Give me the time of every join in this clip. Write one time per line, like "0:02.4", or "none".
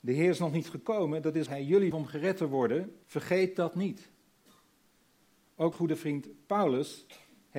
0:01.5
0:01.9
0:03.0
0:05.7